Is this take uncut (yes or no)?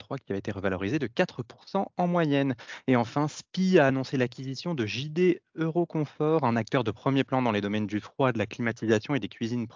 yes